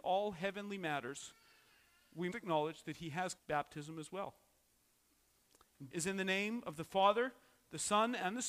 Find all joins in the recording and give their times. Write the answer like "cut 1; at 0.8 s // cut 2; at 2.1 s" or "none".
cut 1; at 2.3 s // cut 2; at 3.4 s // cut 3; at 5.9 s